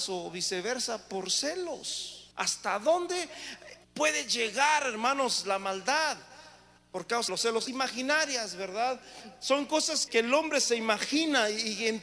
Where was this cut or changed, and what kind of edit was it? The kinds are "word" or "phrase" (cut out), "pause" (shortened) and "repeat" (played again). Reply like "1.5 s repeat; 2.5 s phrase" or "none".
2.3 s pause; 3.8 s pause; 6.8 s pause; 7.3 s word; 7.7 s phrase; 10.1 s word